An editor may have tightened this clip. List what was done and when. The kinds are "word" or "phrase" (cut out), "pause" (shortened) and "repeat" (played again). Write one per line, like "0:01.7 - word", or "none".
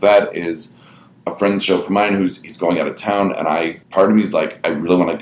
0:03.8 - pause